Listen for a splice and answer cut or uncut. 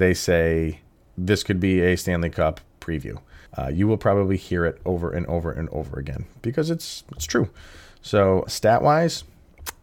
cut